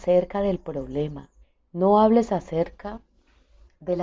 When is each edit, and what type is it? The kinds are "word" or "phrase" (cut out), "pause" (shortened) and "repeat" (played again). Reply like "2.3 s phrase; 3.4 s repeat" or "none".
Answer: 1.4 s pause